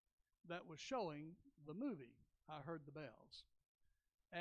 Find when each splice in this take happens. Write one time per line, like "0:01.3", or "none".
none